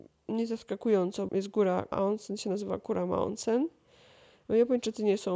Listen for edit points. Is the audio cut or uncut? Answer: cut